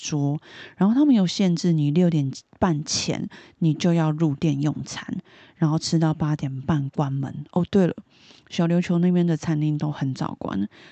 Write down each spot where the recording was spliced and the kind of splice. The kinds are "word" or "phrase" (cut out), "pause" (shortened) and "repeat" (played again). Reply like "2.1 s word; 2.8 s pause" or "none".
none